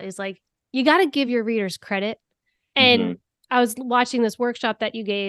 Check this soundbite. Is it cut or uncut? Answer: uncut